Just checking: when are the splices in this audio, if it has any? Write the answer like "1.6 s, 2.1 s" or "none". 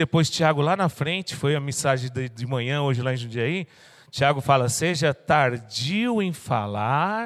none